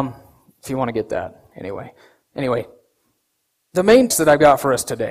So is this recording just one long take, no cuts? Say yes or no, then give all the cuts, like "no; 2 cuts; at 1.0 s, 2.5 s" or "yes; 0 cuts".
no; 1 cut; at 4.1 s